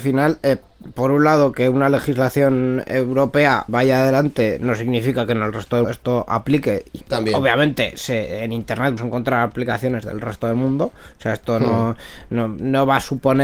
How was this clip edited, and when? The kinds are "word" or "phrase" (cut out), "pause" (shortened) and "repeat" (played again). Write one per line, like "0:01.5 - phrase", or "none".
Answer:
0:03.7 - word
0:05.8 - word
0:07.0 - word
0:09.0 - word